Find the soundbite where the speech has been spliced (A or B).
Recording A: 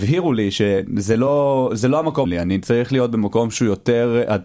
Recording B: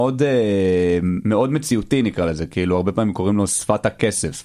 A